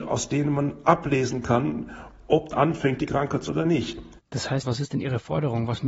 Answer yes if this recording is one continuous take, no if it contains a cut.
no